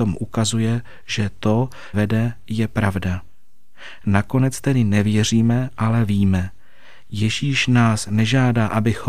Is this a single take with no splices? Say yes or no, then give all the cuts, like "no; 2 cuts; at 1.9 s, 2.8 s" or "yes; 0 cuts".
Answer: no; 1 cut; at 1.9 s